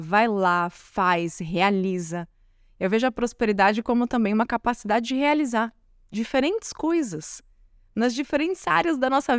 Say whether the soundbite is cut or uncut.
uncut